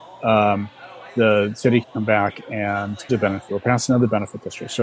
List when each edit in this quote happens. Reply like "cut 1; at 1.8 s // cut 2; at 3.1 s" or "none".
cut 1; at 1.8 s // cut 2; at 3.1 s // cut 3; at 3.5 s